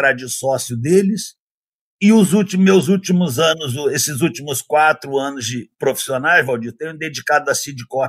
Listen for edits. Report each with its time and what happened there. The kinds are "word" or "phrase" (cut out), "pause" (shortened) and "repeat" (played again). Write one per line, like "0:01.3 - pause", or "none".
none